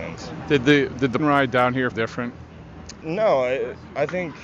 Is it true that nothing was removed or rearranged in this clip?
no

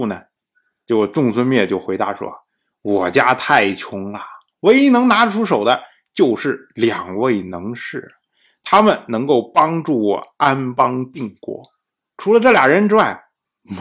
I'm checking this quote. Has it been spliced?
no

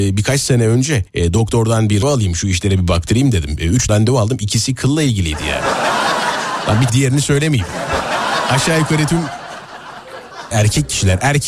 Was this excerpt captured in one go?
no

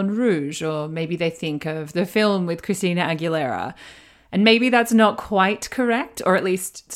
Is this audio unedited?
yes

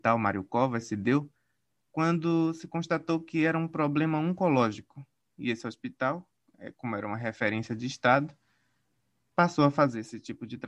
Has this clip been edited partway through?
no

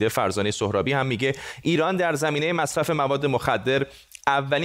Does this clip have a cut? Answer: no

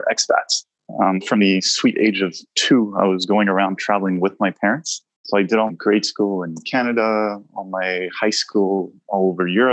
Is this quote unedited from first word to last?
no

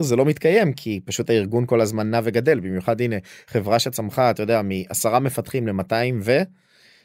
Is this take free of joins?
yes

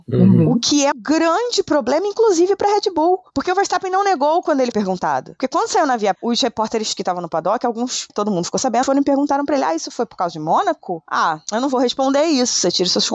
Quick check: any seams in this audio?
yes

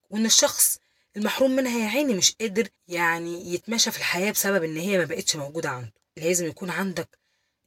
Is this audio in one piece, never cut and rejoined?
no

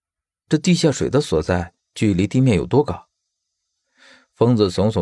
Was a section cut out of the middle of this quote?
no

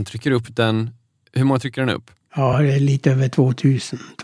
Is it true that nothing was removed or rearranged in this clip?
yes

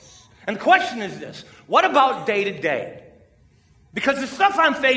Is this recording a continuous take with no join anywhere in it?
yes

